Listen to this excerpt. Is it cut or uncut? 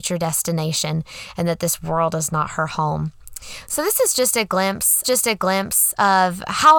cut